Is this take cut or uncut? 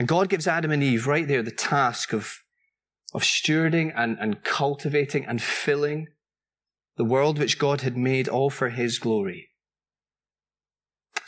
uncut